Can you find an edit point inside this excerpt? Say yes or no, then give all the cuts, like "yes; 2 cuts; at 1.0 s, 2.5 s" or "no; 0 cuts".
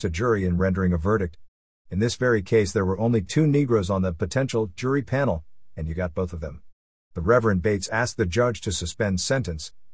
no; 0 cuts